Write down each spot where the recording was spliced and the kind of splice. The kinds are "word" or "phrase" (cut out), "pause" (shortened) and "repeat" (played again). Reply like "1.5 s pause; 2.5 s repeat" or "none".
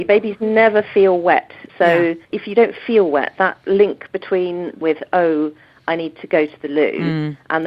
1.7 s pause; 2.2 s pause; 4.8 s phrase

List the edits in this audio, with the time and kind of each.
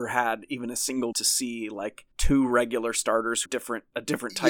1.1 s word; 2.1 s pause; 3.5 s phrase

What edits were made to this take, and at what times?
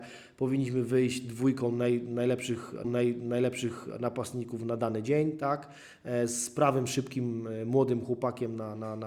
2.8 s repeat

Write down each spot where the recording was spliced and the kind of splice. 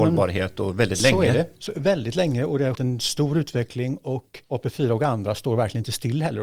2.7 s word; 4.4 s pause

